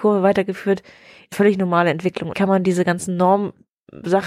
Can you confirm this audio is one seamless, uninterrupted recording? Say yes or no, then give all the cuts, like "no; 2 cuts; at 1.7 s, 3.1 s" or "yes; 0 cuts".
no; 2 cuts; at 1.3 s, 2.3 s